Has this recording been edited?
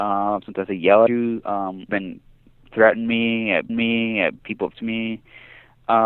yes; 5 cuts; at 1.1 s, 1.9 s, 2.7 s, 3.7 s, 4.7 s

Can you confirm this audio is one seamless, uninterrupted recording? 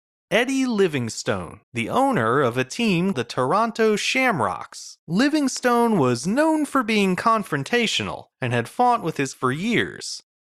no; 5 cuts; at 1.6 s, 3.1 s, 5.0 s, 8.3 s, 9.3 s

